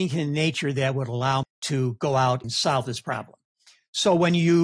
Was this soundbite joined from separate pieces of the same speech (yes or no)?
yes